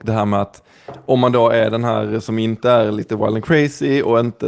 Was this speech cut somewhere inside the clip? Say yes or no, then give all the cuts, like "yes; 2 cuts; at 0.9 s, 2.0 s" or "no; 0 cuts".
no; 0 cuts